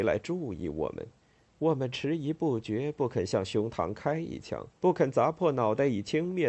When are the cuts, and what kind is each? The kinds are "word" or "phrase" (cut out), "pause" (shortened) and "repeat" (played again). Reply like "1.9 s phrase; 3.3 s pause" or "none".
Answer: 1.2 s pause; 4.8 s pause